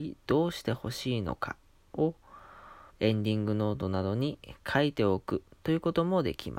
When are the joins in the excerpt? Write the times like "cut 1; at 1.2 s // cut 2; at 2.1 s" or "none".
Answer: cut 1; at 2.9 s